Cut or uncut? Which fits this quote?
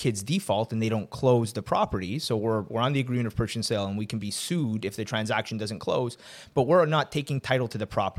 uncut